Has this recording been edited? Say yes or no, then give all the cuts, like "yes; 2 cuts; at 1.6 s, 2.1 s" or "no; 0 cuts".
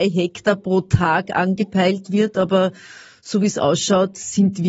no; 0 cuts